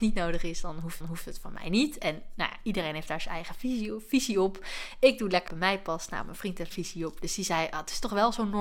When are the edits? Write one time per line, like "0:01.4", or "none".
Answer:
0:01.0
0:05.5
0:06.7